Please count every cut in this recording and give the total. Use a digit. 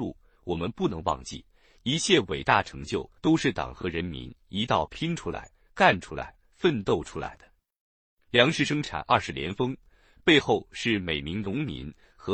1